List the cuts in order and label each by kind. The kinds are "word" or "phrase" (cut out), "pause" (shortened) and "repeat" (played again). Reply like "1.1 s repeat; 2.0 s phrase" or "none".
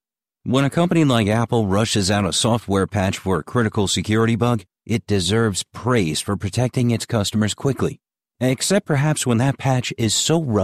none

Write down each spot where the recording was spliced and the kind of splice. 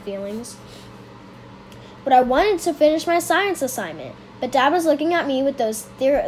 none

